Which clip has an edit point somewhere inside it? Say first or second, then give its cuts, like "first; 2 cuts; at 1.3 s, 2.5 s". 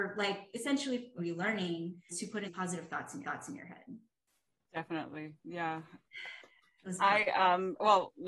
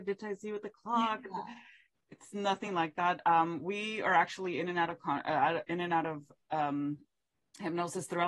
first; 5 cuts; at 1.2 s, 2.1 s, 2.5 s, 3.2 s, 5.4 s